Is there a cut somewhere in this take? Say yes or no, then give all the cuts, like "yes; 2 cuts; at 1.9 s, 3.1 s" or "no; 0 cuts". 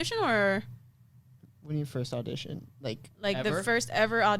no; 0 cuts